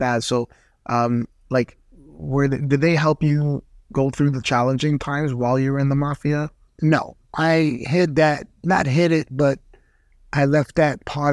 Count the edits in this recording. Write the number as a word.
zero